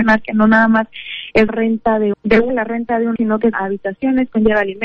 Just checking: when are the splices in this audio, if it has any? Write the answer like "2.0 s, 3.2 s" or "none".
1.5 s, 2.1 s, 2.5 s, 3.2 s, 3.5 s